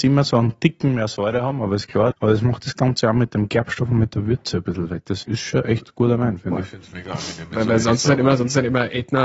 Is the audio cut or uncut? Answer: cut